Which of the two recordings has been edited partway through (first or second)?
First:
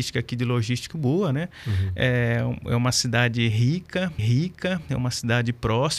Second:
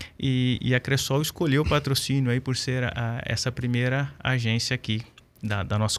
first